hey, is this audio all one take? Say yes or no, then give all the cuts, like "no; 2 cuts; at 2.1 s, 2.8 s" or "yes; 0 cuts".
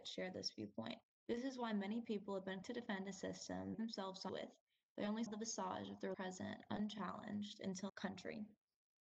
no; 7 cuts; at 1.0 s, 2.6 s, 3.7 s, 4.3 s, 5.3 s, 6.1 s, 7.9 s